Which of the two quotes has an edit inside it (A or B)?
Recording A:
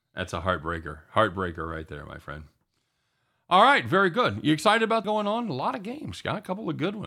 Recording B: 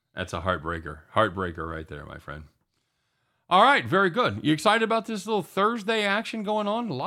A